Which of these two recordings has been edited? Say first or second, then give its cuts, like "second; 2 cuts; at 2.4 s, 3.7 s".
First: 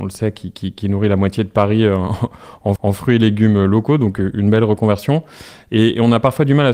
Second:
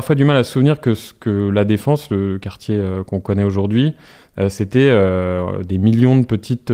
first; 1 cut; at 2.8 s